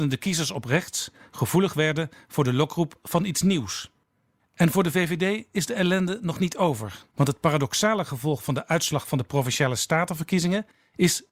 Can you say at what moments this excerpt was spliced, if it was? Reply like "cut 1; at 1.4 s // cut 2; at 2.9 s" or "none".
cut 1; at 7.1 s